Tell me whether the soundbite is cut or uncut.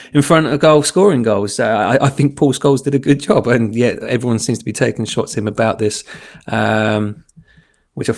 uncut